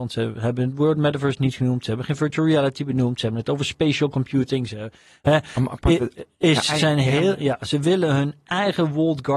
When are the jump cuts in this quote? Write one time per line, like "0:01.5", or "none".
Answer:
none